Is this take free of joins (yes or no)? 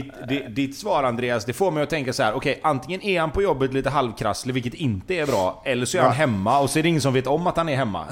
yes